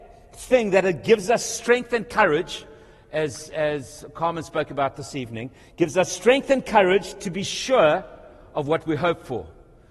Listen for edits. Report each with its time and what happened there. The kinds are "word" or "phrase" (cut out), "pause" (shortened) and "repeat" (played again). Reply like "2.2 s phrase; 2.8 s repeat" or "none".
none